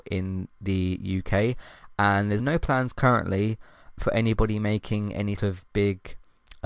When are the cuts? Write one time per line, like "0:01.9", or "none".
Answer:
0:02.4
0:04.0
0:05.4